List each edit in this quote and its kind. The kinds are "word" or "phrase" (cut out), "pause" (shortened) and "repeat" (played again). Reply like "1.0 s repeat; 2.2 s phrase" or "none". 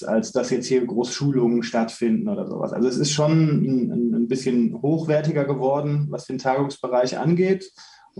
none